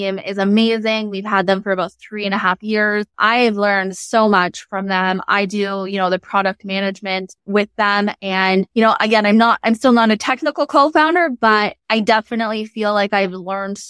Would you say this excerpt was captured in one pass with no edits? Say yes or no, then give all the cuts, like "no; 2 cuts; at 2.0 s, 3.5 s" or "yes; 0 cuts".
no; 2 cuts; at 8.7 s, 11.8 s